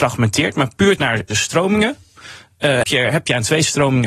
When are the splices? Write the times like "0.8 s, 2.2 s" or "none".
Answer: 1.0 s, 1.3 s, 2.8 s